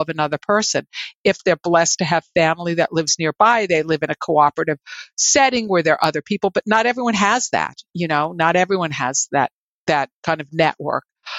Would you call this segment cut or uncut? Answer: uncut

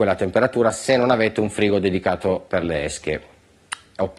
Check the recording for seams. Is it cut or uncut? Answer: uncut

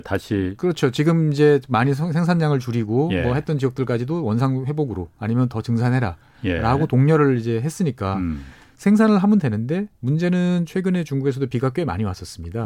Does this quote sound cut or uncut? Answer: uncut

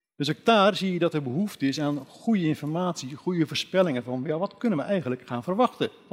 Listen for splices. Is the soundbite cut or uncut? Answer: uncut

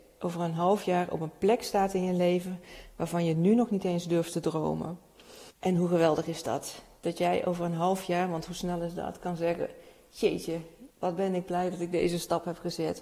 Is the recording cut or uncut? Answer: cut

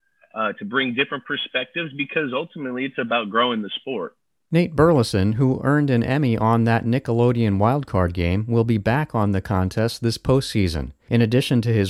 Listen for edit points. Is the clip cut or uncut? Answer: uncut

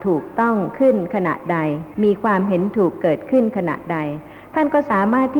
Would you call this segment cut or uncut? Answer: uncut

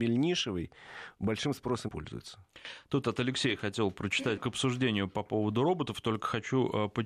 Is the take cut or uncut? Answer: cut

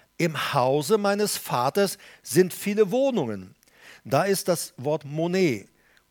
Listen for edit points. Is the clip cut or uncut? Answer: uncut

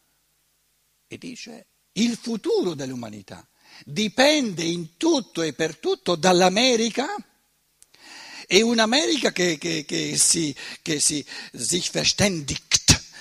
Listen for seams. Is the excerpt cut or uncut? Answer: uncut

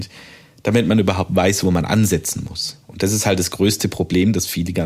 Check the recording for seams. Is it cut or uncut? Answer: uncut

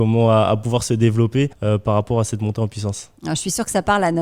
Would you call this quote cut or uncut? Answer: cut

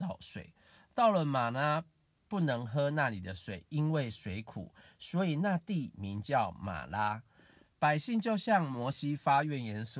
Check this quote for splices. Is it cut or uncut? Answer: uncut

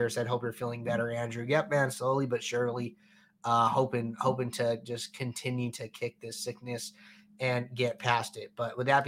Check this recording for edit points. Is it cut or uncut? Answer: uncut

